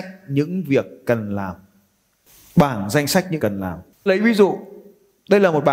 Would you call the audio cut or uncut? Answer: cut